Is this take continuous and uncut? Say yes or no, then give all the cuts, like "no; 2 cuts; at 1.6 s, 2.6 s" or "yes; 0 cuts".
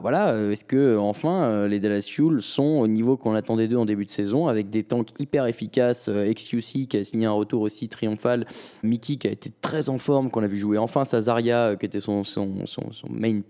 no; 1 cut; at 8.8 s